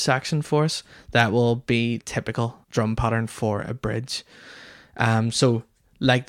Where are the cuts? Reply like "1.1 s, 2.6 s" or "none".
2.0 s, 2.6 s